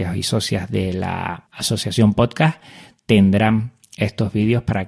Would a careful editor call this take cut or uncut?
uncut